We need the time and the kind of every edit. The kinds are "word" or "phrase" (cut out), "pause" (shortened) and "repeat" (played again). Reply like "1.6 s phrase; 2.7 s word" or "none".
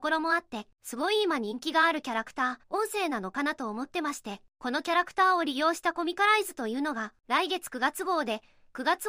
2.6 s pause